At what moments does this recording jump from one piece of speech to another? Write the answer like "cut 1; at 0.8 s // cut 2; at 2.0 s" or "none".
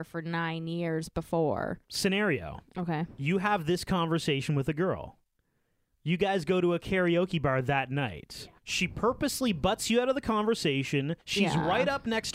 cut 1; at 1.8 s // cut 2; at 8.6 s // cut 3; at 11.2 s